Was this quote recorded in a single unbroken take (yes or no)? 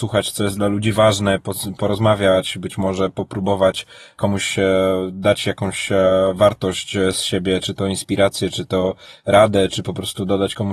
yes